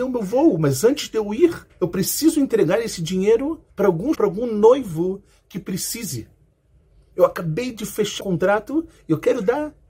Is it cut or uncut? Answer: cut